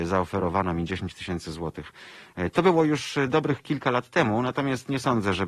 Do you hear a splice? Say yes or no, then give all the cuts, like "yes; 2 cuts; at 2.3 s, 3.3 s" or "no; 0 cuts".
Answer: no; 0 cuts